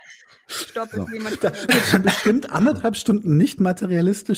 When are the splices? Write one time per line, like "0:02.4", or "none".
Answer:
0:01.7